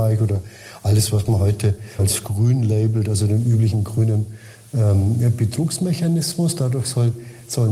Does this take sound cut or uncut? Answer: cut